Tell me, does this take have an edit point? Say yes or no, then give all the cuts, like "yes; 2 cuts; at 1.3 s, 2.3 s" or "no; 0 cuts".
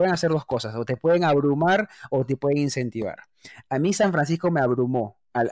no; 0 cuts